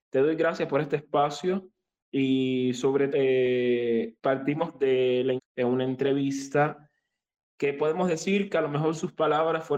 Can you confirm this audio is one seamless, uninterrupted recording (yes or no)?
no